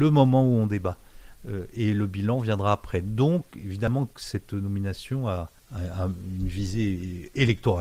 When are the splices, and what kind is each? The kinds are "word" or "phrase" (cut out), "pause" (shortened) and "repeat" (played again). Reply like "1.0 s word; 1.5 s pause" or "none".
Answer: 3.5 s pause; 5.6 s pause